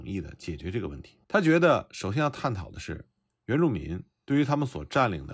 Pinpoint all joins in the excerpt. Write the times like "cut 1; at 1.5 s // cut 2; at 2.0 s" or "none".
cut 1; at 1.2 s